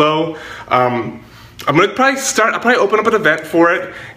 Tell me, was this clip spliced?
no; 0 cuts

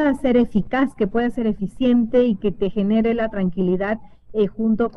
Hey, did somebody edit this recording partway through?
no; 0 cuts

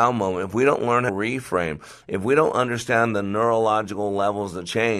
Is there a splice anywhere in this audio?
yes; 1 cut; at 1.1 s

